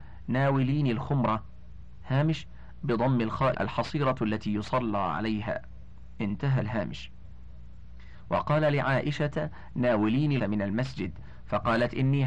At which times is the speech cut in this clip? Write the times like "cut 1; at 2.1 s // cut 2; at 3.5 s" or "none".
cut 1; at 2.8 s // cut 2; at 3.5 s // cut 3; at 10.4 s